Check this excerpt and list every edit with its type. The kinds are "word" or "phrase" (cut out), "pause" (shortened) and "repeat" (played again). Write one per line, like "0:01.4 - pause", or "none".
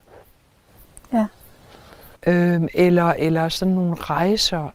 0:02.2 - pause